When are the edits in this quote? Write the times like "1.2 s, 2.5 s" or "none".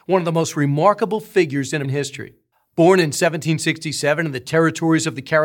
1.8 s, 2.5 s